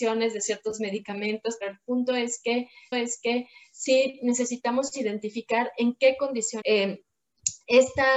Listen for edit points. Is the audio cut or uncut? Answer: cut